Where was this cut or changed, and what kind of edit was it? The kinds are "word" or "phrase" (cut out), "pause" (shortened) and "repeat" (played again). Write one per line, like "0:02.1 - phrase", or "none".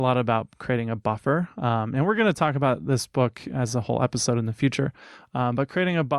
none